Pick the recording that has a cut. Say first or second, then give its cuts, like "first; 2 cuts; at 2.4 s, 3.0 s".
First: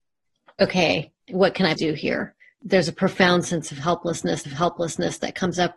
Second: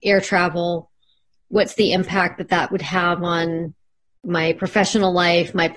first; 3 cuts; at 1.8 s, 2.4 s, 4.4 s